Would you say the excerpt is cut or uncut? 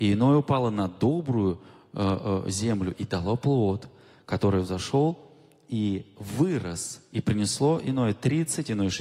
uncut